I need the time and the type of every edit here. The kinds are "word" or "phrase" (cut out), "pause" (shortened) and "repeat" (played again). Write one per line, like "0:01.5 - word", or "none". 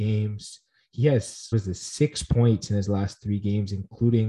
0:01.5 - word